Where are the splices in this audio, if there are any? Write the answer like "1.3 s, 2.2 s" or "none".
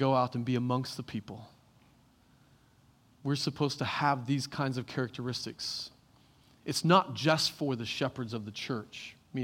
none